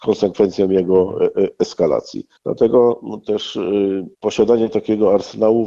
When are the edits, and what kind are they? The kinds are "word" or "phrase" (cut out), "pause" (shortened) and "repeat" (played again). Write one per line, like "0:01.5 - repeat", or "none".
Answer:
0:02.4 - pause
0:04.1 - pause